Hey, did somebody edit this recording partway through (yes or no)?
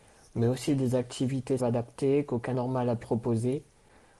yes